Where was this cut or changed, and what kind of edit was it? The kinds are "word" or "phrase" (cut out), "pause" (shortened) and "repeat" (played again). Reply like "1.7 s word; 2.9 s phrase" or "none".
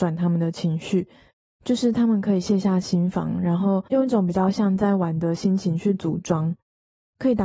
3.9 s pause

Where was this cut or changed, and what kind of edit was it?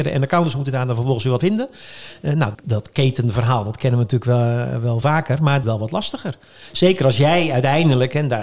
1.4 s word; 2.5 s word; 5.0 s word; 5.6 s phrase

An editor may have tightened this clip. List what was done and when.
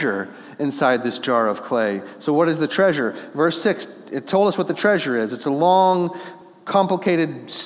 none

